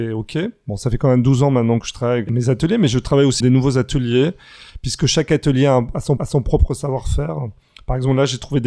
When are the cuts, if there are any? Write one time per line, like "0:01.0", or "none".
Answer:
0:02.3
0:03.4
0:06.2